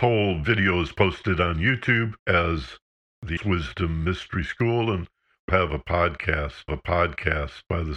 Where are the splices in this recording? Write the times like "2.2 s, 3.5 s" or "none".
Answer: 2.2 s, 3.4 s, 5.5 s, 6.7 s